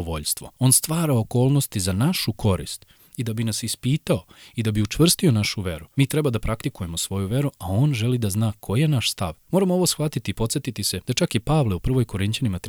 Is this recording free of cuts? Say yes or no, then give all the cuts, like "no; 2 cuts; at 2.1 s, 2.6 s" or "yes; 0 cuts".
yes; 0 cuts